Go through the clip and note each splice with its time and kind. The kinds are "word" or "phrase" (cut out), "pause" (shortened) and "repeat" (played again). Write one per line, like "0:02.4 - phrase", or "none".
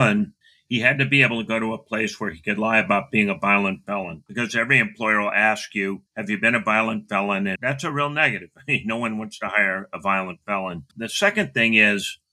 0:06.1 - pause
0:10.9 - pause